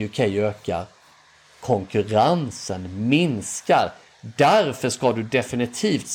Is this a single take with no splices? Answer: yes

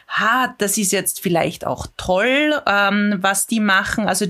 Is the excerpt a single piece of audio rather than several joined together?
yes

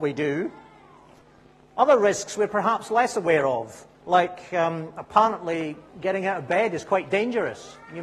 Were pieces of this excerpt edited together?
yes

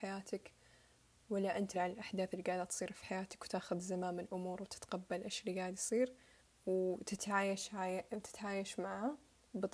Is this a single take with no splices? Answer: no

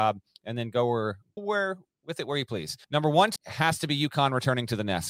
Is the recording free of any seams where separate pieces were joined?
no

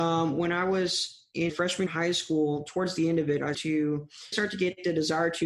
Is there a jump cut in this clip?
yes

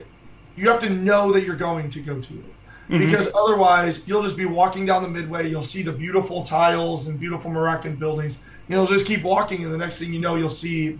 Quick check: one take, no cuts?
yes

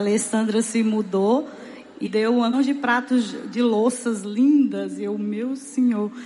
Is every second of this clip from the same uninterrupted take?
no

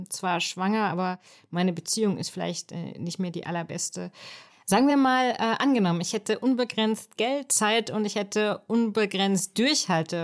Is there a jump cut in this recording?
no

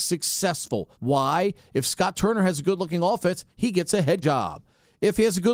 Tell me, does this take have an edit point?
yes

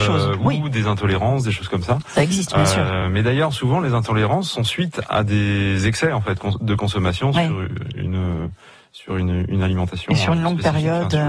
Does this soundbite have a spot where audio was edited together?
no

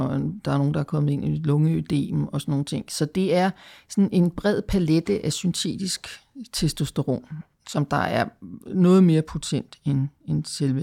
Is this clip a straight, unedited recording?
yes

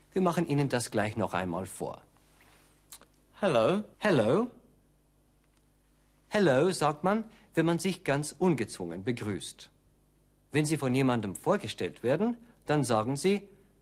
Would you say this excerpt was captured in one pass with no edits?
no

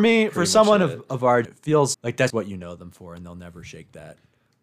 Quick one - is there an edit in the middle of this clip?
yes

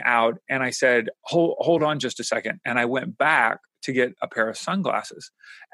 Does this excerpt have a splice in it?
no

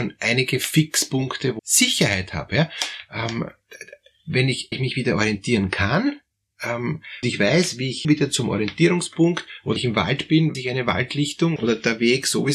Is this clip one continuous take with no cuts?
no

